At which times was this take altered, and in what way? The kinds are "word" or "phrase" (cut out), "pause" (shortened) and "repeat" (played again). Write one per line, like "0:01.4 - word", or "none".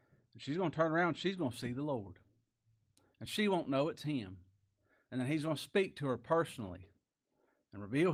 none